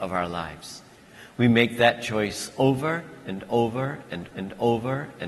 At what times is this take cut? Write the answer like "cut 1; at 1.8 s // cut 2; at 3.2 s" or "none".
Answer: cut 1; at 4.3 s